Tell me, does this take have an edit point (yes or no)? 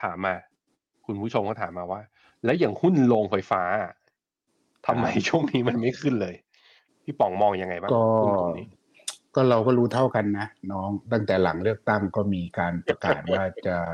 no